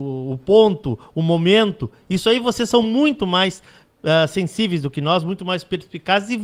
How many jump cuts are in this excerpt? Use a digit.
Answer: 0